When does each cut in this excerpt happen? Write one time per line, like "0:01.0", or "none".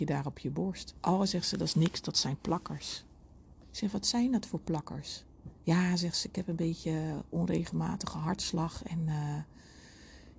none